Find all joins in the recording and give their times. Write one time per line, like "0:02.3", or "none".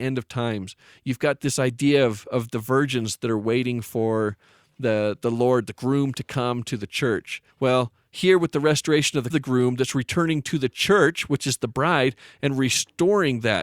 0:07.5
0:09.3